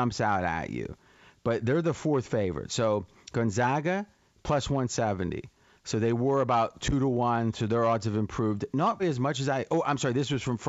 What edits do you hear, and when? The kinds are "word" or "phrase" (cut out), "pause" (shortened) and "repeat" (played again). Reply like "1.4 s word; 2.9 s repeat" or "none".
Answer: 9.0 s word